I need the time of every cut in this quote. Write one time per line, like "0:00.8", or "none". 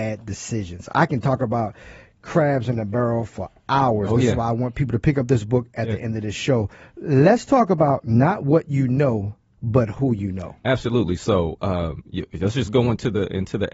none